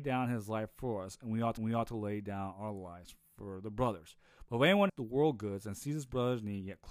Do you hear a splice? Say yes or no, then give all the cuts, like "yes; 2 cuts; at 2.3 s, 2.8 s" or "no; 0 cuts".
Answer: yes; 2 cuts; at 1.6 s, 4.9 s